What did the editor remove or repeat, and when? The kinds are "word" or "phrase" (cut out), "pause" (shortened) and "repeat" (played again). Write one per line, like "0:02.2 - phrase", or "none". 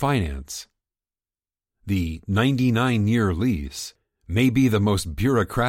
none